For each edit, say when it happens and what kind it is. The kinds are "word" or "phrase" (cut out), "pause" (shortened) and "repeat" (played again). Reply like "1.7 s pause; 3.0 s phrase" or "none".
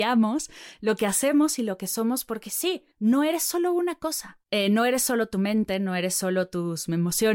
2.9 s pause; 4.4 s pause